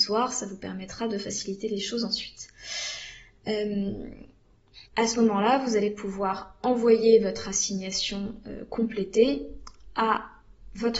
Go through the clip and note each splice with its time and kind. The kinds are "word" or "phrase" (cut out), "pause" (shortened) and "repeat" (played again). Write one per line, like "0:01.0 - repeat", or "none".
0:04.9 - pause